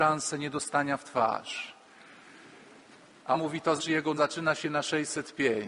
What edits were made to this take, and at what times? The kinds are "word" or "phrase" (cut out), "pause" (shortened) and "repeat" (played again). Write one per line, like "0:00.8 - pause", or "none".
0:03.3 - word
0:03.8 - word
0:04.2 - word